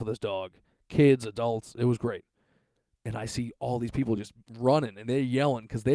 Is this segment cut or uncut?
uncut